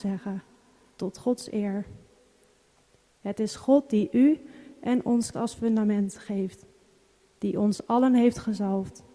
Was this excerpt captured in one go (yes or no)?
no